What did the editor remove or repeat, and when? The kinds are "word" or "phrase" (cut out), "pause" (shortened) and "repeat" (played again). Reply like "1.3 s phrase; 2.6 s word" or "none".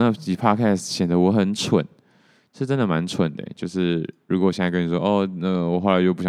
none